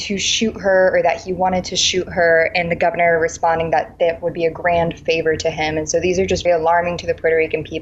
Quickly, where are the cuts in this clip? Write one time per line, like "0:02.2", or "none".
0:06.5